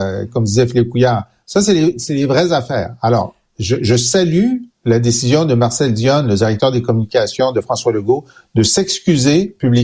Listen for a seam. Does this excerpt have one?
no; 0 cuts

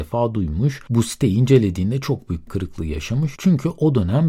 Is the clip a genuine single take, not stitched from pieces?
no; 1 cut; at 2.5 s

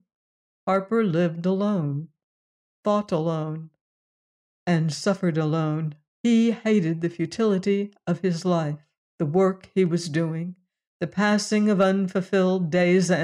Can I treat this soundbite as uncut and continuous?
no; 2 cuts; at 6.1 s, 9.1 s

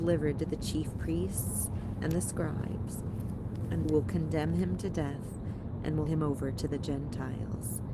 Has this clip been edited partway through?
yes; 2 cuts; at 3.8 s, 6.1 s

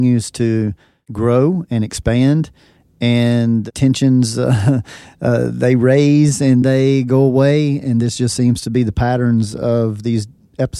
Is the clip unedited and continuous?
no; 1 cut; at 6.6 s

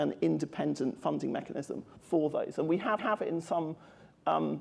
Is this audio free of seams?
no; 2 cuts; at 2.0 s, 3.0 s

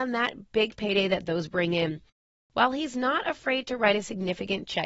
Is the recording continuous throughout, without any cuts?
yes; 0 cuts

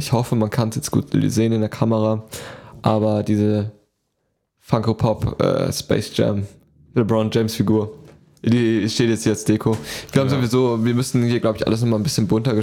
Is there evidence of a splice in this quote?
no; 0 cuts

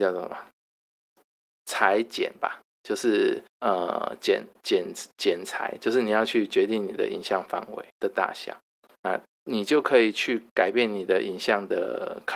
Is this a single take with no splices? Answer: no; 5 cuts; at 2.7 s, 3.5 s, 7.9 s, 8.9 s, 10.5 s

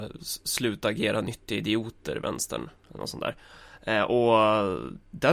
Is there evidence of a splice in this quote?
no; 0 cuts

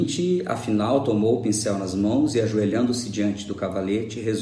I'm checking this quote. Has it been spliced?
no; 0 cuts

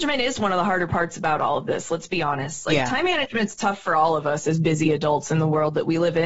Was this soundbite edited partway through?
no; 0 cuts

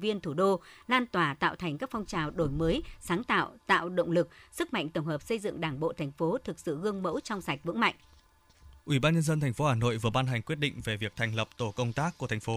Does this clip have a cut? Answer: yes; 1 cut; at 8.8 s

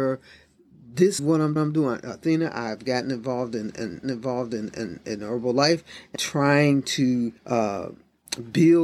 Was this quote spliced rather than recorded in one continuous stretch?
yes; 5 cuts; at 1.2 s, 1.6 s, 4.0 s, 6.2 s, 7.4 s

